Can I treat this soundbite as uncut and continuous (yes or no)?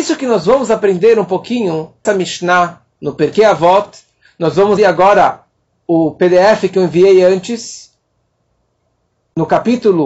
no